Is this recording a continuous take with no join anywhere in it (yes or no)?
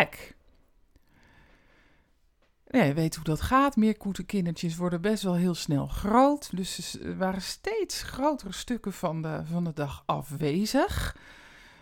yes